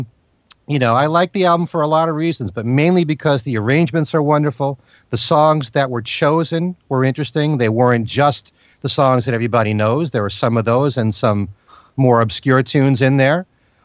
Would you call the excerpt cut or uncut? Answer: uncut